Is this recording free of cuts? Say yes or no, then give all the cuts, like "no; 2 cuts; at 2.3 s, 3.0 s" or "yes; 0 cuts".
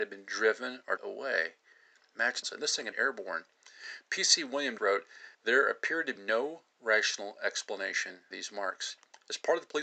no; 7 cuts; at 1.0 s, 2.4 s, 2.9 s, 4.8 s, 5.3 s, 6.2 s, 8.3 s